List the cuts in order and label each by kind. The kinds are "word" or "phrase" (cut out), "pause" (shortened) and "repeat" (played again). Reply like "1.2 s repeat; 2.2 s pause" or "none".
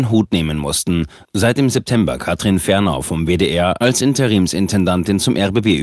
none